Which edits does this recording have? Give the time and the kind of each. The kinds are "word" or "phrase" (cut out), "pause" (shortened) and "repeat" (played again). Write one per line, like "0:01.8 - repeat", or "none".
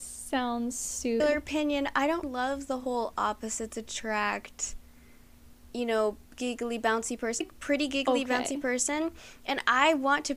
0:01.2 - word
0:02.2 - word
0:06.2 - pause
0:07.4 - phrase